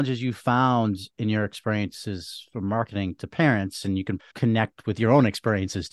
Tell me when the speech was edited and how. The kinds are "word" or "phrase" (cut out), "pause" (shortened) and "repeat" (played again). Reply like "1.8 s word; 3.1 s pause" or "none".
4.2 s word